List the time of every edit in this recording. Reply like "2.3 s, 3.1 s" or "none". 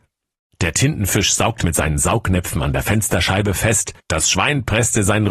1.6 s, 4.0 s